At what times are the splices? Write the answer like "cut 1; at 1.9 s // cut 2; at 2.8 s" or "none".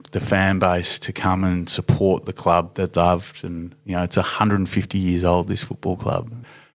cut 1; at 2.7 s

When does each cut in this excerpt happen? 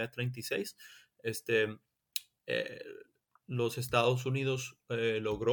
none

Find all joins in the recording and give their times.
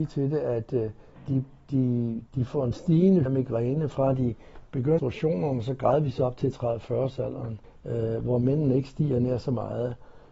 cut 1; at 1.2 s // cut 2; at 2.3 s // cut 3; at 3.3 s // cut 4; at 5.0 s // cut 5; at 7.6 s

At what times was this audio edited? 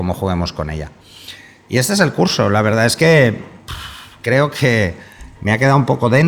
none

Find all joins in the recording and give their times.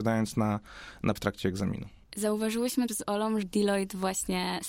cut 1; at 1.2 s // cut 2; at 2.9 s // cut 3; at 3.4 s

